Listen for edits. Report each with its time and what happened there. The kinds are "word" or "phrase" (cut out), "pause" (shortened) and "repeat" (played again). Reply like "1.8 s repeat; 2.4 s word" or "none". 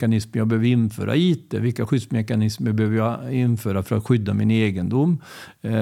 none